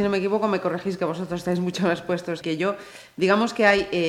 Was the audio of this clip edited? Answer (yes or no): yes